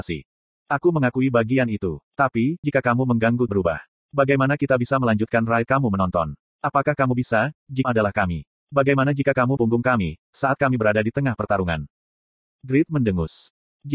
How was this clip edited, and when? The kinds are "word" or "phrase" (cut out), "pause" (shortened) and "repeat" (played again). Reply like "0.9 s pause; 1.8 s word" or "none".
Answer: 2.6 s word; 3.5 s word; 5.7 s word; 7.8 s word; 9.6 s word

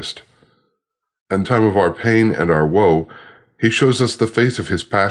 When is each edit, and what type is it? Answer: 1.4 s phrase

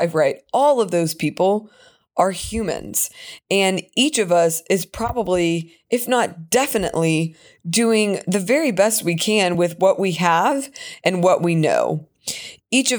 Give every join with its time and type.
none

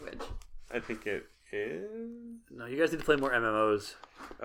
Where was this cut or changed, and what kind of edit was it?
none

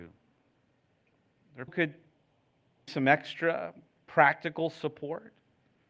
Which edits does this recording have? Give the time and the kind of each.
1.7 s word; 2.9 s word

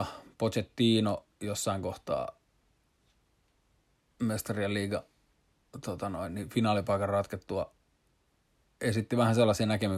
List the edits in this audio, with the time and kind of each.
none

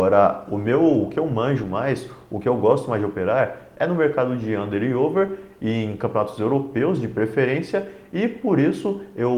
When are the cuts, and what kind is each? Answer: none

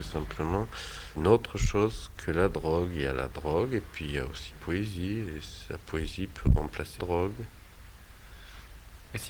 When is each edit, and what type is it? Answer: 1.1 s word; 2.2 s word; 4.5 s word; 7.0 s word

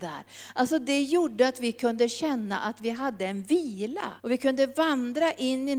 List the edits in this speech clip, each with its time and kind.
4.2 s pause

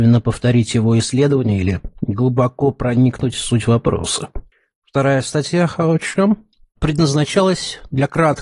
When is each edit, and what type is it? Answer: none

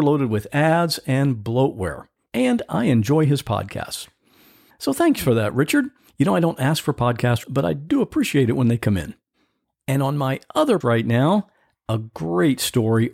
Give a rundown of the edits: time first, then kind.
7.4 s word; 10.8 s word

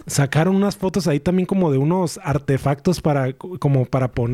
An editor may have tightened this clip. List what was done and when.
none

